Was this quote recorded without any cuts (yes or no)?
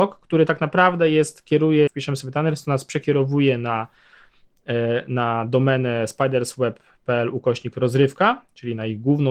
no